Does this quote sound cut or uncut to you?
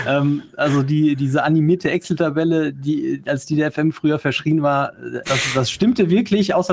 cut